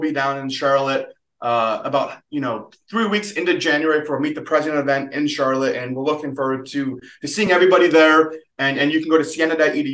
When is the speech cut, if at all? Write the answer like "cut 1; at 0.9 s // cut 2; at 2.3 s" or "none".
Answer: none